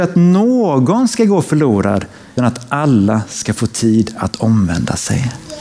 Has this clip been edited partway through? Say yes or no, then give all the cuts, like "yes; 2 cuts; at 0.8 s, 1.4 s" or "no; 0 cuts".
yes; 1 cut; at 2.4 s